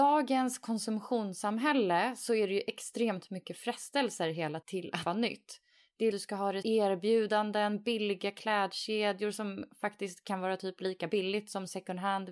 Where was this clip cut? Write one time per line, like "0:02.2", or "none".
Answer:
0:04.6
0:05.1
0:06.1
0:06.6